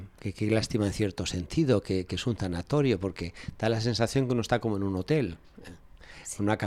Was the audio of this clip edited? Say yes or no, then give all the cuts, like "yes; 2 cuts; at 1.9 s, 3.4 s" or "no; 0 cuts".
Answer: no; 0 cuts